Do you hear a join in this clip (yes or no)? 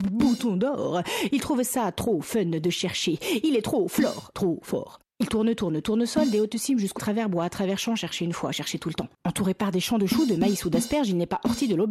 yes